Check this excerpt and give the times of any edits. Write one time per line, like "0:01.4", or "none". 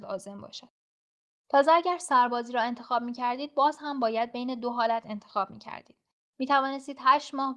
none